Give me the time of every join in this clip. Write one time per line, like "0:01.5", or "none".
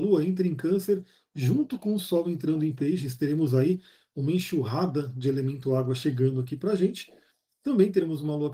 none